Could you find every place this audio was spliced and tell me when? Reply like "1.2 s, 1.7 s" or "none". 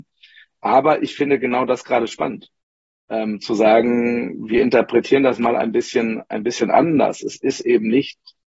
none